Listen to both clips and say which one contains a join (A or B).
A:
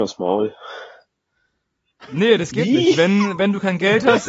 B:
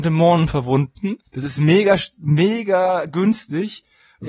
B